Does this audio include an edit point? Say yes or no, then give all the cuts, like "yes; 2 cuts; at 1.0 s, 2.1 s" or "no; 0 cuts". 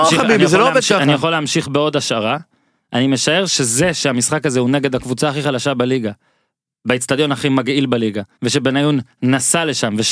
yes; 1 cut; at 8.3 s